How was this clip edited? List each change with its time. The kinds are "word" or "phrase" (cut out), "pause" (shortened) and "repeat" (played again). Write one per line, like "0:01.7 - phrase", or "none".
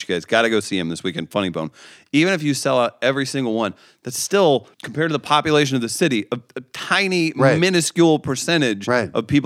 0:04.7 - pause